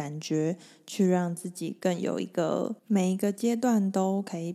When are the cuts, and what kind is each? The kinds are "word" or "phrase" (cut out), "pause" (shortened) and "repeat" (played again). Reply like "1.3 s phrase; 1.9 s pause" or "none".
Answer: 2.8 s pause